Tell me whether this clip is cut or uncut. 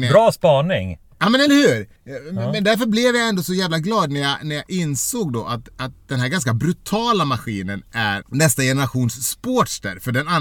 cut